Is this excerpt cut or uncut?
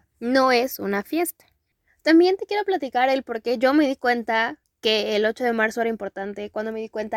uncut